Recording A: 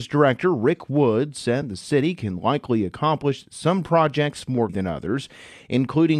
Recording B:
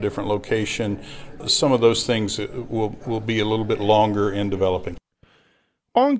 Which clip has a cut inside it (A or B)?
A